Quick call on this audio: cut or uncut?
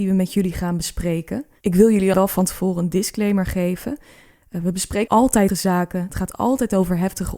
cut